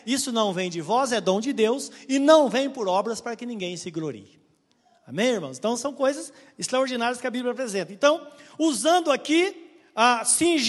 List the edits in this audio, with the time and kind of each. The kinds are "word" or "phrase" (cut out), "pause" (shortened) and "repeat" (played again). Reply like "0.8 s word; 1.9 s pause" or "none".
none